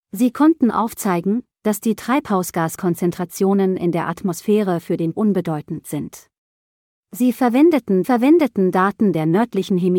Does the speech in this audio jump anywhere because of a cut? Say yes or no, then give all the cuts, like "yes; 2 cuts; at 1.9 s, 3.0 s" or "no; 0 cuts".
yes; 2 cuts; at 5.1 s, 8.0 s